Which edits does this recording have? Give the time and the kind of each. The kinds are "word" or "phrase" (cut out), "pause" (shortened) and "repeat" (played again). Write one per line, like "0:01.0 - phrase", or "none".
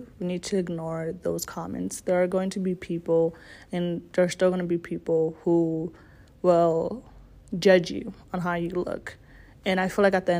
none